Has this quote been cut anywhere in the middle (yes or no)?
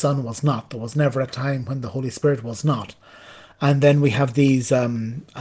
no